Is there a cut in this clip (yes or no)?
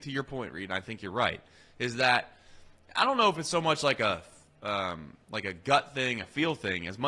no